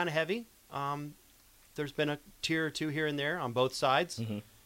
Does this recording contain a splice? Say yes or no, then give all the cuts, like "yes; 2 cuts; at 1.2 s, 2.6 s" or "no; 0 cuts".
no; 0 cuts